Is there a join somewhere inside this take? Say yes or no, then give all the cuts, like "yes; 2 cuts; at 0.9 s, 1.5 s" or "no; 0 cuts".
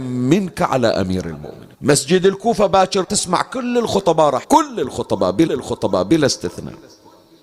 yes; 4 cuts; at 1.7 s, 3.0 s, 4.4 s, 5.5 s